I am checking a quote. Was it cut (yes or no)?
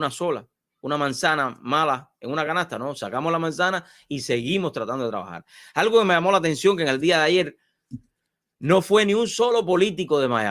no